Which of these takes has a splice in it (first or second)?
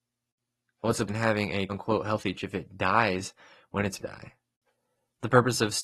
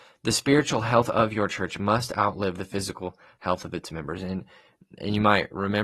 first